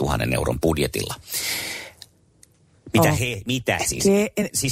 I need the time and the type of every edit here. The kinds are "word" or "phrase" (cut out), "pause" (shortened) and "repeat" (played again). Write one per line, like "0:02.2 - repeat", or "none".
0:03.8 - word